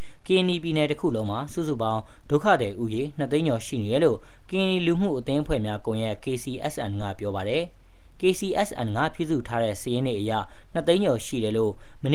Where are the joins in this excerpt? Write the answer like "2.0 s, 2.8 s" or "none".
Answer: none